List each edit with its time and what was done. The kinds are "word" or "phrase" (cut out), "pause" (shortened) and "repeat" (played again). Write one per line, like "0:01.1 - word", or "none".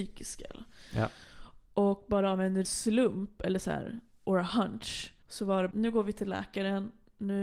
0:02.6 - word
0:05.2 - pause
0:05.7 - word